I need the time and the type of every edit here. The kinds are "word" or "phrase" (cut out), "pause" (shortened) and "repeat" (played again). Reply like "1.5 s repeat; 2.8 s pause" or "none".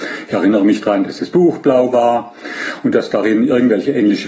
none